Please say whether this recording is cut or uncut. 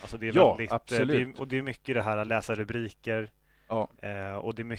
uncut